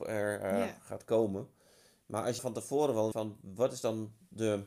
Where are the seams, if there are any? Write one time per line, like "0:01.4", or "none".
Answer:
0:02.4
0:03.1